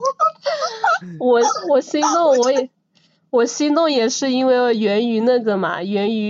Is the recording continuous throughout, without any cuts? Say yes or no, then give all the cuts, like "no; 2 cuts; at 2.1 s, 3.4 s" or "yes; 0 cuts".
yes; 0 cuts